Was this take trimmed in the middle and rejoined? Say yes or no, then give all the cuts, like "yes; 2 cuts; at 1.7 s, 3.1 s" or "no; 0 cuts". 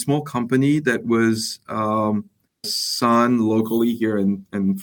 yes; 1 cut; at 2.6 s